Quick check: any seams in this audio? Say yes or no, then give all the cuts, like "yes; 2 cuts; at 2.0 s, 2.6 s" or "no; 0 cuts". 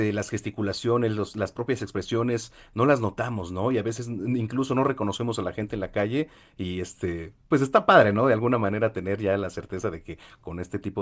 no; 0 cuts